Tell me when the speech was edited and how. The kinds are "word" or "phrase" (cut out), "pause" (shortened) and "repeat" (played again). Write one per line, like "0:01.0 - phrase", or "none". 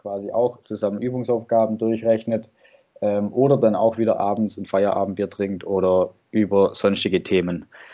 none